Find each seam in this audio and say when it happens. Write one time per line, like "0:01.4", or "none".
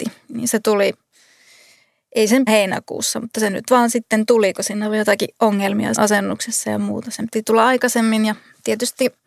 0:02.5
0:06.0